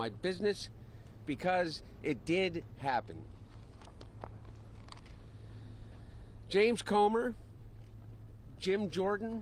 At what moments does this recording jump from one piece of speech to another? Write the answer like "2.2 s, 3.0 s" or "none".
2.7 s